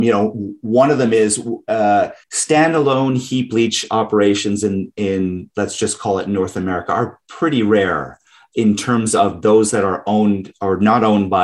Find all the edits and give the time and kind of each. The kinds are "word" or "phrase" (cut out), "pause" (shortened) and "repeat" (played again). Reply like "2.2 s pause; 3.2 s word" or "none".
2.2 s pause